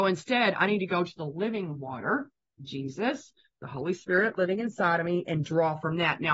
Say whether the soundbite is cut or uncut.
uncut